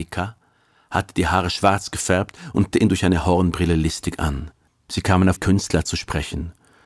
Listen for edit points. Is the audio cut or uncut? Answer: cut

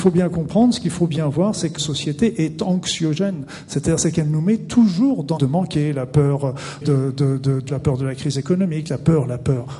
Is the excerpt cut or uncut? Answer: cut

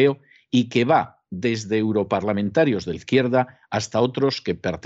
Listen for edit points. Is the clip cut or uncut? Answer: cut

